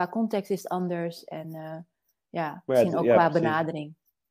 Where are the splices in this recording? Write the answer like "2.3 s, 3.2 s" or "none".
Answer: none